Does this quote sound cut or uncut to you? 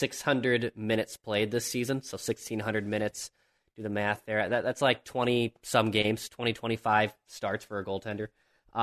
uncut